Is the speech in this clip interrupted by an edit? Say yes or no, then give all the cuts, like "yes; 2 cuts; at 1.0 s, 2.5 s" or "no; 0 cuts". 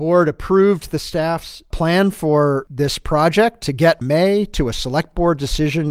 yes; 1 cut; at 4.0 s